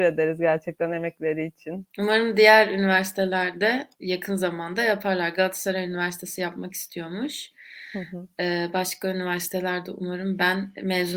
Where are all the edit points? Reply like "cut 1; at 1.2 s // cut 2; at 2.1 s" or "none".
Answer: cut 1; at 1.9 s // cut 2; at 3.9 s